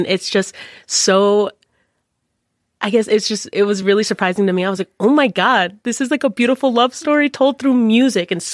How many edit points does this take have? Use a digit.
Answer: 0